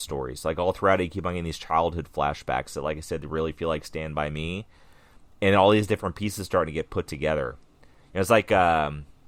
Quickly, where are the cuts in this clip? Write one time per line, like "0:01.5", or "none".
none